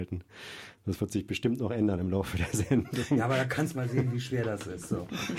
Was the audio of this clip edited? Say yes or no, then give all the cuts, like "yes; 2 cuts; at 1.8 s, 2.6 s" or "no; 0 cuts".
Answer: no; 0 cuts